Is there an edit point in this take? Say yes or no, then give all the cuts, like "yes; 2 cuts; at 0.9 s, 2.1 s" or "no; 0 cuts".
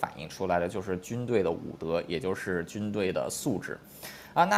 no; 0 cuts